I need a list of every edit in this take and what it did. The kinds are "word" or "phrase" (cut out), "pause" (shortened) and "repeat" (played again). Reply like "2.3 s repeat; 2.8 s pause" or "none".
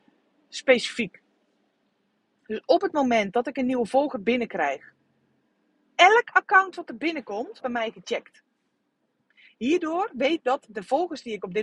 7.6 s word; 10.4 s word